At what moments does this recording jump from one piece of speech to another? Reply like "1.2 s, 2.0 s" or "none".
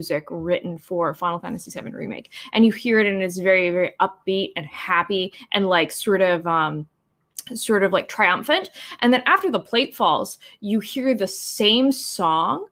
none